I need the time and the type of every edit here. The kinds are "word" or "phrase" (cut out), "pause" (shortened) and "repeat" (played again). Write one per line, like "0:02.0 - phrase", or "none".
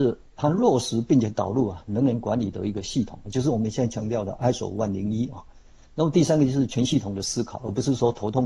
none